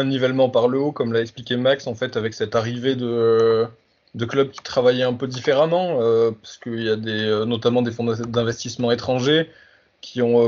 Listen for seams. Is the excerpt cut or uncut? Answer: uncut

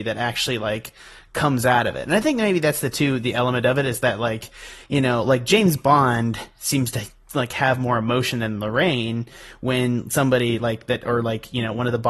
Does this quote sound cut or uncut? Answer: uncut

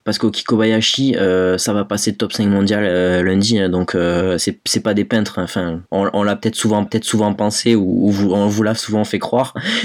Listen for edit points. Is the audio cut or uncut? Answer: cut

